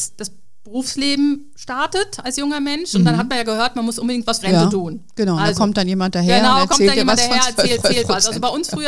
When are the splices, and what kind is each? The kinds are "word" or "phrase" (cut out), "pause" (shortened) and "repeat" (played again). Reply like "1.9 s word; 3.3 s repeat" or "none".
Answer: 4.4 s word; 7.8 s repeat